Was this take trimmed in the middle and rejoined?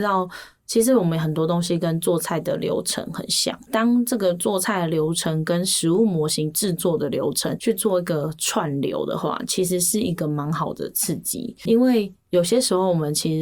yes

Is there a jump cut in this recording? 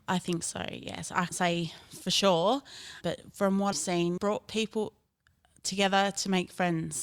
yes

